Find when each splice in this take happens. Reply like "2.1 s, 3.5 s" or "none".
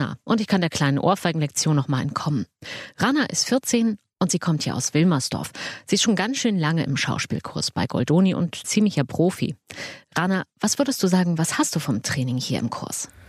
8.6 s